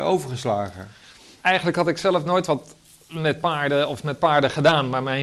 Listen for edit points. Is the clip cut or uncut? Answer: uncut